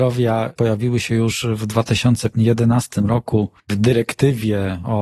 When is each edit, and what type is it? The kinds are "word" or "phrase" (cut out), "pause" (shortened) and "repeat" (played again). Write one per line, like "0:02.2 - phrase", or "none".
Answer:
0:03.6 - pause